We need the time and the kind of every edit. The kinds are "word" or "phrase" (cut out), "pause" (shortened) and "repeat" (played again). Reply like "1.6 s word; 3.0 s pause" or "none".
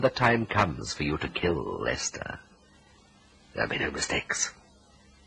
3.7 s word